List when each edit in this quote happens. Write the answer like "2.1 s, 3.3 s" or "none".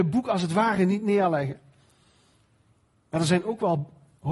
none